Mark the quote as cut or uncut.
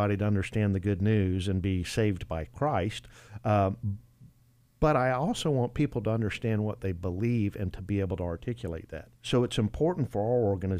cut